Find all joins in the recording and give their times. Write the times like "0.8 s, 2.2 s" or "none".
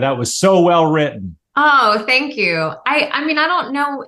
1.4 s